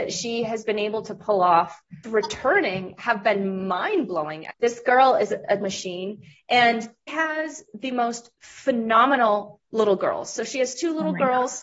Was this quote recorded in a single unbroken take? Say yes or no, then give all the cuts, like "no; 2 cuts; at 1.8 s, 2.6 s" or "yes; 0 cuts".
no; 4 cuts; at 2.0 s, 4.5 s, 5.6 s, 7.1 s